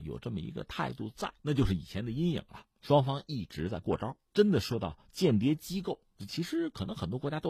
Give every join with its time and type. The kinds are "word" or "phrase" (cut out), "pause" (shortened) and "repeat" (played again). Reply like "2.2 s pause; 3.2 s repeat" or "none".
1.4 s pause; 2.7 s pause; 4.3 s pause; 6.3 s phrase